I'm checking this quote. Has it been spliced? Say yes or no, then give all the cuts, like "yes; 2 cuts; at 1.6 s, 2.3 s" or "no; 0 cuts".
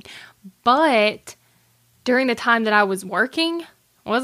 no; 0 cuts